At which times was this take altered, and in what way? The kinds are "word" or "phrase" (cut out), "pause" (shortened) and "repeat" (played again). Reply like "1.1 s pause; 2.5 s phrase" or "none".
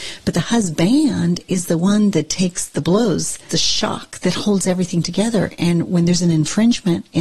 3.5 s phrase